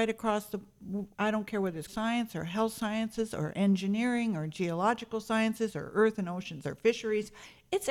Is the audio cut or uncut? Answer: cut